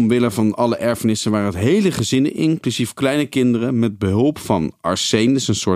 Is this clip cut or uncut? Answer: uncut